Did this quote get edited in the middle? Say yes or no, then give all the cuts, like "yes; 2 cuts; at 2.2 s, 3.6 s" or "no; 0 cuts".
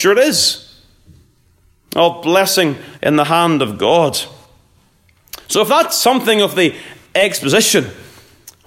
yes; 1 cut; at 3.0 s